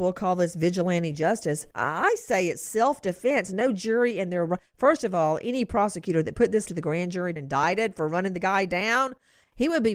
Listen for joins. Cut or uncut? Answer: cut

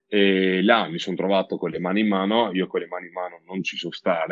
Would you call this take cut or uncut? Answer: uncut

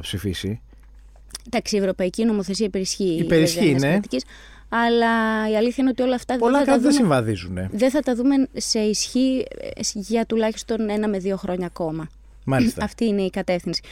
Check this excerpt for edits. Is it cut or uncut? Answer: uncut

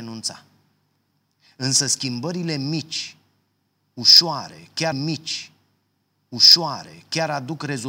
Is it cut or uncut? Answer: cut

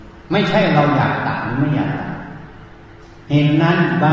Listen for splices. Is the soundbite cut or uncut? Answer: uncut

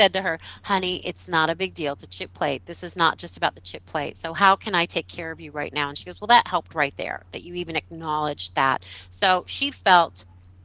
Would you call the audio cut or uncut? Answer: uncut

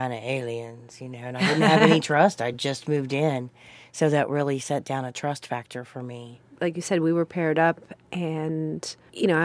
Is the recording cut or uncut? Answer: uncut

